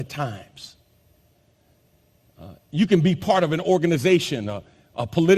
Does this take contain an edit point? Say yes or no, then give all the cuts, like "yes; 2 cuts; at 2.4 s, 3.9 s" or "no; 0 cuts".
no; 0 cuts